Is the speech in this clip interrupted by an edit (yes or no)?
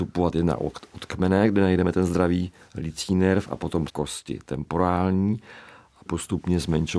yes